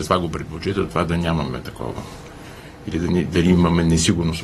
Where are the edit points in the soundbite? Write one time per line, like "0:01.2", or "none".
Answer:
0:00.9